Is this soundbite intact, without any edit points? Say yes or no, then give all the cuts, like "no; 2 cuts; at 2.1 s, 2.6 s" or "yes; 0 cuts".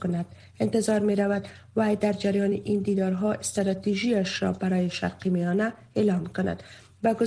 yes; 0 cuts